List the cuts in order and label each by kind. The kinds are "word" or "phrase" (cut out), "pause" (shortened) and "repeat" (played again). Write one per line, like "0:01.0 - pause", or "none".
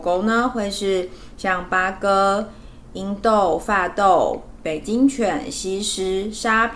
none